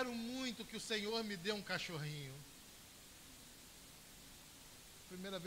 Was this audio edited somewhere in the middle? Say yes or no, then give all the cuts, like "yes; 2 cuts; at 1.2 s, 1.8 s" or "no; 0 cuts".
no; 0 cuts